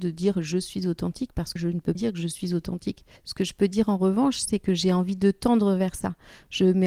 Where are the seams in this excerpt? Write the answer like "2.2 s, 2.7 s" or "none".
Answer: 1.6 s, 1.9 s, 3.2 s

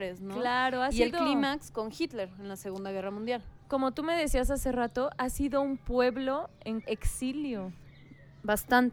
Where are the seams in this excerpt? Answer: 3.6 s, 6.8 s

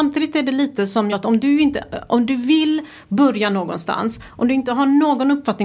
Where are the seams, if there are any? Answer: 1.1 s

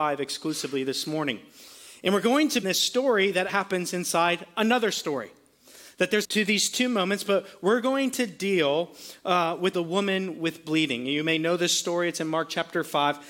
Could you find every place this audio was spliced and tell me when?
2.6 s, 3.5 s, 6.2 s, 9.7 s

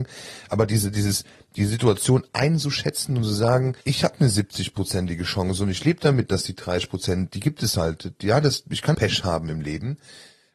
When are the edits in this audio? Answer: 3.8 s, 8.9 s

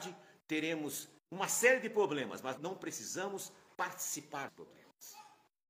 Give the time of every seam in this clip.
1.2 s, 2.6 s, 4.5 s

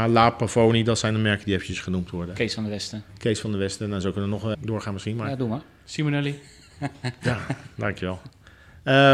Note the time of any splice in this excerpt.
4.5 s

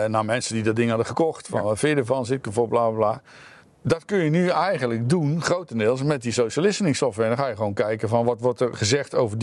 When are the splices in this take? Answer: 3.6 s

